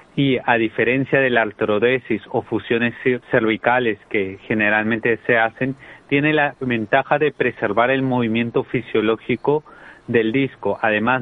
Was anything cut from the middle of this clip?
yes; 1 cut; at 3.2 s

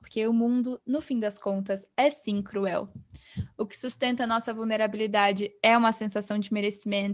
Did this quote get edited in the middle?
no; 0 cuts

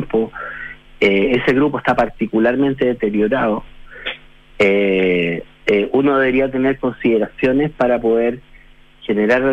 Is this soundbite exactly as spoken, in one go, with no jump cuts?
yes; 0 cuts

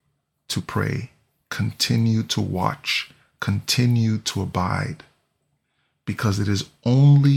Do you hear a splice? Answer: no; 0 cuts

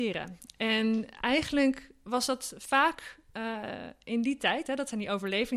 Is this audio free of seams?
yes; 0 cuts

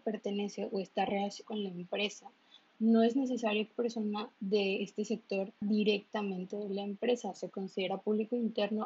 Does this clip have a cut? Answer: yes; 4 cuts; at 1.4 s, 3.7 s, 4.3 s, 5.6 s

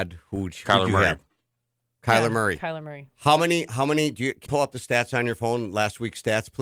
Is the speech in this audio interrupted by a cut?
yes; 1 cut; at 4.5 s

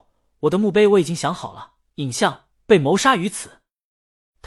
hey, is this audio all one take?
yes; 0 cuts

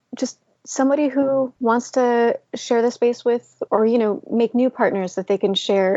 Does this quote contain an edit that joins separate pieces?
yes; 2 cuts; at 1.6 s, 3.7 s

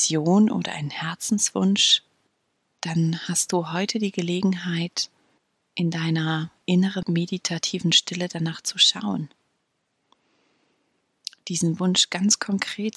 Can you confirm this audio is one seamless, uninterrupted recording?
yes; 0 cuts

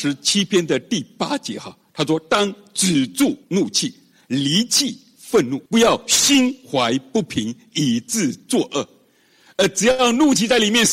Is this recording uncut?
no; 2 cuts; at 3.4 s, 5.7 s

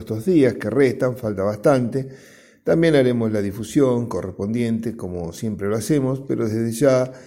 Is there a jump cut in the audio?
no; 0 cuts

